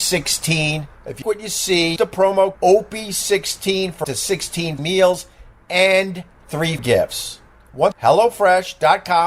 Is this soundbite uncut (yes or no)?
no